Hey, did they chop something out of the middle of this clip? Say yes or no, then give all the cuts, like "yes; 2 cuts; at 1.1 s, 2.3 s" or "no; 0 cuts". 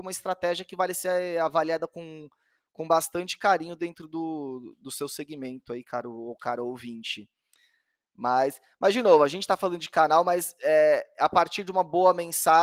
no; 0 cuts